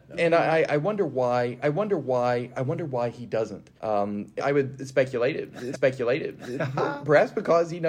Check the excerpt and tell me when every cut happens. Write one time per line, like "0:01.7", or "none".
0:01.6
0:03.8
0:04.4
0:05.7